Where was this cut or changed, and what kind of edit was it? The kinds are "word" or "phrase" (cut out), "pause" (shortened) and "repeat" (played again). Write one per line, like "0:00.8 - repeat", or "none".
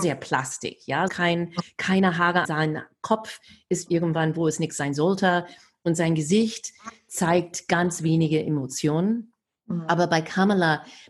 0:01.1 - word
0:02.4 - word
0:03.9 - word